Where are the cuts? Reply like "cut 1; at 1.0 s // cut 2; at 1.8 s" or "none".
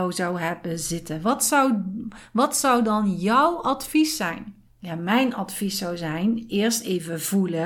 cut 1; at 4.7 s